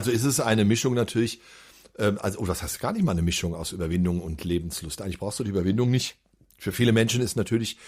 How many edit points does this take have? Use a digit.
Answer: 0